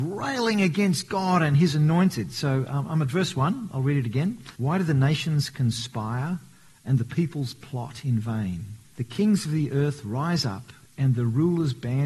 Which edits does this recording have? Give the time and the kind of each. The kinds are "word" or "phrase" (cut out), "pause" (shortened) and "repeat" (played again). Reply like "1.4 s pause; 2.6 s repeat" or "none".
4.5 s pause; 8.8 s pause